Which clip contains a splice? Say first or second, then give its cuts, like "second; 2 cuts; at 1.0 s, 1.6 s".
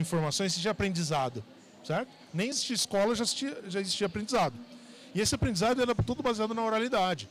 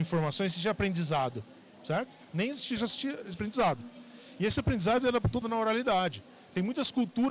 second; 3 cuts; at 2.8 s, 3.3 s, 5.4 s